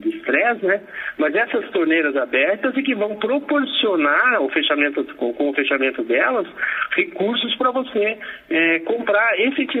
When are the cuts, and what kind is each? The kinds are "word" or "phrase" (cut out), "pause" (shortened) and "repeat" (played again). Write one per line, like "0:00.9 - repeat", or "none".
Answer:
none